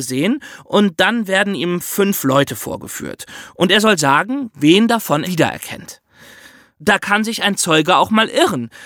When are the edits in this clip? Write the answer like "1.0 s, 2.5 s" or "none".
5.2 s